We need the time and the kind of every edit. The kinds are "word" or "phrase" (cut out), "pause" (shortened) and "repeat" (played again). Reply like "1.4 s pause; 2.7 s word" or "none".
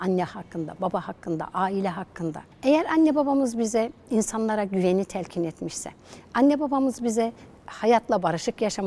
2.5 s pause